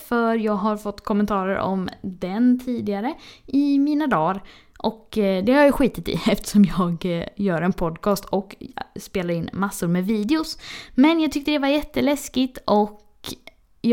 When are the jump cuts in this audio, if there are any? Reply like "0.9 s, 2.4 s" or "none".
none